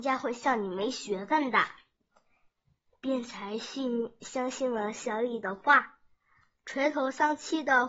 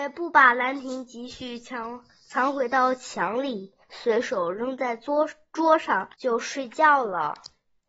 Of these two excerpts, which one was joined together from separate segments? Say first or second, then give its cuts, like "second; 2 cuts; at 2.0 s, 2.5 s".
second; 2 cuts; at 3.8 s, 6.1 s